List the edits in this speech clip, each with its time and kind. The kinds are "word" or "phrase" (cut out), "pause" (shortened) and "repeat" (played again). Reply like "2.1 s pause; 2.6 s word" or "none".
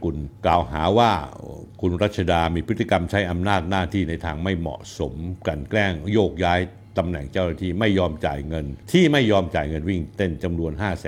8.8 s pause

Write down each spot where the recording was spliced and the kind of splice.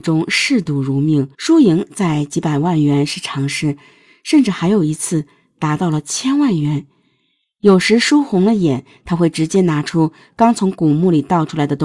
1.3 s pause

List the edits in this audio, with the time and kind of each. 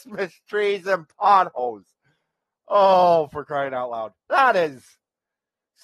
4.2 s pause

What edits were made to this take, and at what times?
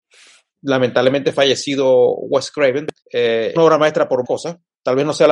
3.0 s pause; 3.6 s word; 4.2 s word

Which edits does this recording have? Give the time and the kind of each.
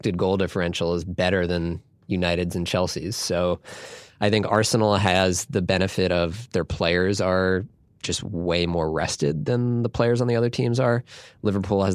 none

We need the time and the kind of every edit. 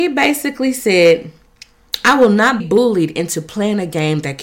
2.6 s word

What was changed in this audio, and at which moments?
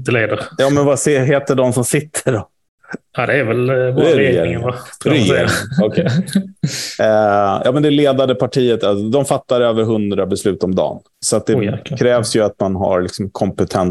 11.1 s pause

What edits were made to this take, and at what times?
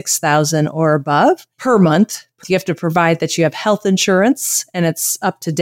1.5 s pause; 2.4 s word

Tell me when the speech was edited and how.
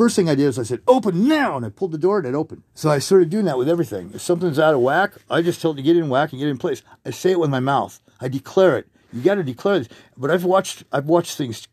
2.7 s pause

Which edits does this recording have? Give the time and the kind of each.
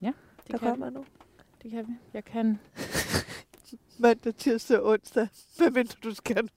1.4 s pause; 2.1 s pause; 2.7 s pause

